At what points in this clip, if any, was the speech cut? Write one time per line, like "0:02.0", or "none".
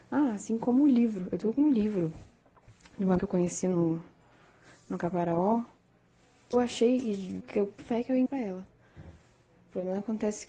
0:03.2
0:06.5
0:07.4
0:07.8
0:08.3